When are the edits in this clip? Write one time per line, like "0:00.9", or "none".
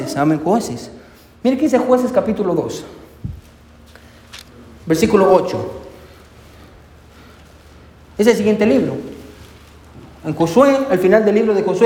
none